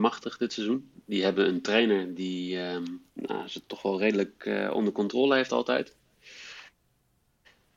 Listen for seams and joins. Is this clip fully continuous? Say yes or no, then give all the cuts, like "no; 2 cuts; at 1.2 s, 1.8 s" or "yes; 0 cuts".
no; 2 cuts; at 0.9 s, 3.1 s